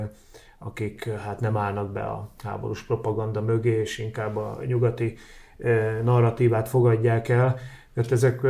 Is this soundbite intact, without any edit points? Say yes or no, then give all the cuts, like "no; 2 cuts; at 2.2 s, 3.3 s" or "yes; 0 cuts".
yes; 0 cuts